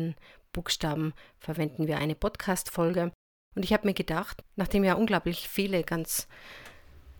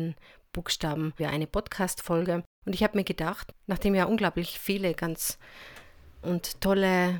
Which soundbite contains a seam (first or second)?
second